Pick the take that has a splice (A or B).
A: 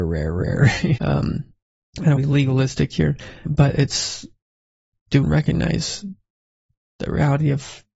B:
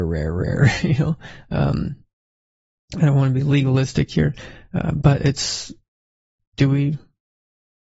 A